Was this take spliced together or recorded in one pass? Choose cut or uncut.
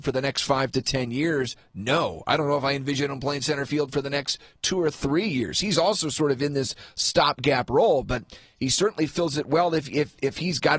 uncut